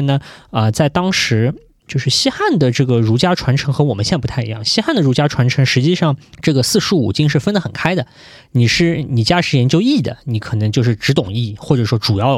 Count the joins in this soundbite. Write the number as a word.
one